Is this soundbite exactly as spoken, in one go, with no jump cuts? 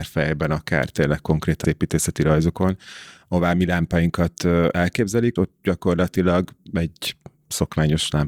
no; 2 cuts; at 1.6 s, 5.4 s

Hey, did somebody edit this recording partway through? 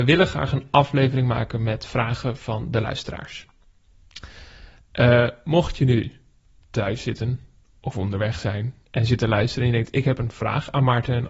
no; 0 cuts

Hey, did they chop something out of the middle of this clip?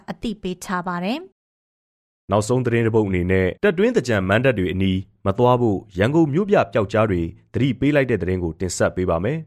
yes; 2 cuts; at 1.3 s, 3.6 s

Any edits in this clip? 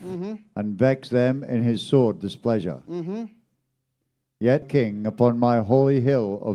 yes; 1 cut; at 4.6 s

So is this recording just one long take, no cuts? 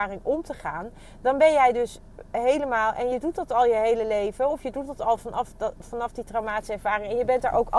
yes; 0 cuts

